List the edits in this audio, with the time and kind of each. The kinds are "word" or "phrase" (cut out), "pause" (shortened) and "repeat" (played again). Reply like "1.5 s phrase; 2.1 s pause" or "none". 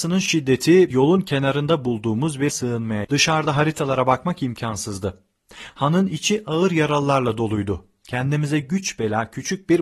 0.9 s word; 2.5 s word; 3.0 s word